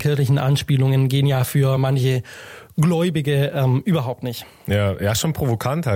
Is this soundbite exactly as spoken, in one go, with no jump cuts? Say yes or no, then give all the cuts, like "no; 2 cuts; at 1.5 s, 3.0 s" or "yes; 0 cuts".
yes; 0 cuts